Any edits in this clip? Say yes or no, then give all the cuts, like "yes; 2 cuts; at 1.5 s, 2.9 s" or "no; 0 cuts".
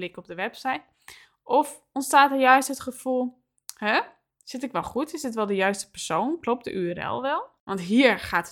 no; 0 cuts